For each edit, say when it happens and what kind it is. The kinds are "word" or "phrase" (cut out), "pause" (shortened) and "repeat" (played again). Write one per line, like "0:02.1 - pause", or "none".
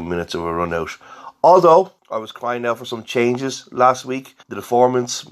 0:02.0 - pause
0:04.4 - pause